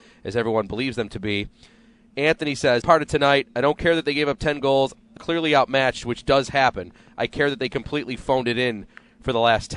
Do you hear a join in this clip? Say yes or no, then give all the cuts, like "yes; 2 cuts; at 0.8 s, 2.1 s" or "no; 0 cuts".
yes; 2 cuts; at 2.8 s, 5.2 s